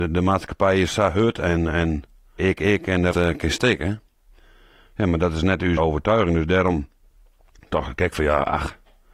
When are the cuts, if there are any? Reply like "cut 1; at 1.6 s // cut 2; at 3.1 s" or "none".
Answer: cut 1; at 2.4 s // cut 2; at 3.1 s // cut 3; at 5.8 s